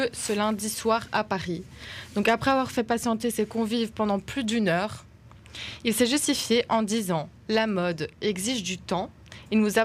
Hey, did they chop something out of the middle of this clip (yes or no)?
no